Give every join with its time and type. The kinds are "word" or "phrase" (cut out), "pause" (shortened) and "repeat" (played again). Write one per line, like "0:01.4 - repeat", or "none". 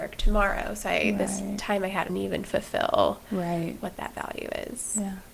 0:02.1 - phrase